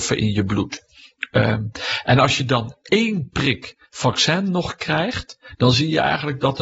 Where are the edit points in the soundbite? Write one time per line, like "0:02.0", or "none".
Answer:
none